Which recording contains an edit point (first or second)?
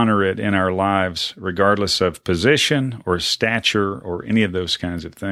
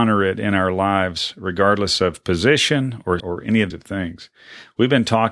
second